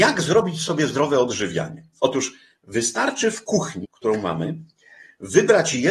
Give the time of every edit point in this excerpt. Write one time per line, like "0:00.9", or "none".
0:03.8